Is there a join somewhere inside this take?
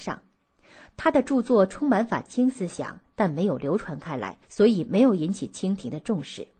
yes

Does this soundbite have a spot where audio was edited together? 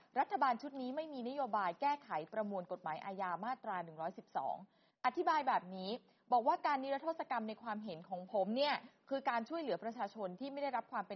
no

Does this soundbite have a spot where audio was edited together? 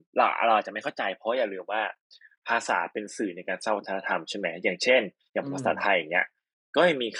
no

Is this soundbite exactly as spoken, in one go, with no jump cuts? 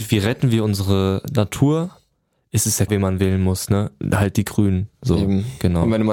no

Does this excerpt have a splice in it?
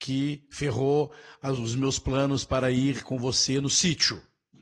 no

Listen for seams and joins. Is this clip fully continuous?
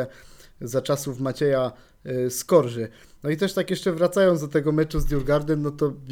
yes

